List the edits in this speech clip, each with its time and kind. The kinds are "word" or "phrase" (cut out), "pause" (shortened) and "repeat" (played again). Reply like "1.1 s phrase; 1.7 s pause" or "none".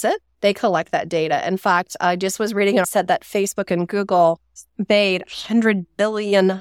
2.8 s phrase